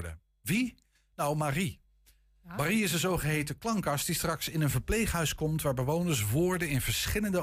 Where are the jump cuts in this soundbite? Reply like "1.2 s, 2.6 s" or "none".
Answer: none